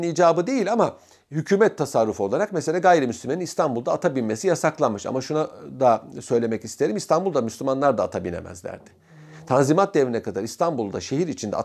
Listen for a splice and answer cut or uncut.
uncut